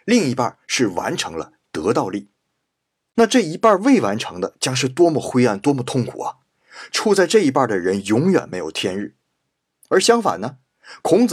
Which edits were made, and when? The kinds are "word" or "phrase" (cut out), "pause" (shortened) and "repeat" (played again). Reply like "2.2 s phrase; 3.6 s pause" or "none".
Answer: none